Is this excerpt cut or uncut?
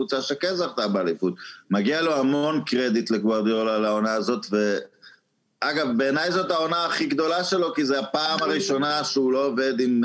uncut